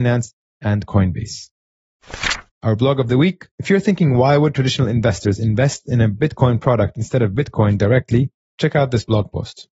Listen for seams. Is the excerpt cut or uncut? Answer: cut